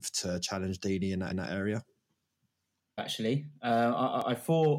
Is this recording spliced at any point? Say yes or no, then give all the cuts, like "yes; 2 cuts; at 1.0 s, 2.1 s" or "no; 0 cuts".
yes; 2 cuts; at 1.3 s, 3.0 s